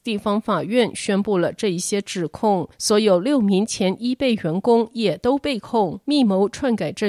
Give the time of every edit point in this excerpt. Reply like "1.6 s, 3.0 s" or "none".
2.7 s